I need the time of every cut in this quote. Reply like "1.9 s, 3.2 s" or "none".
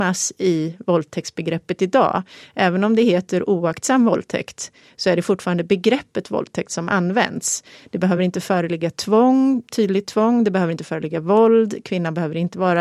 none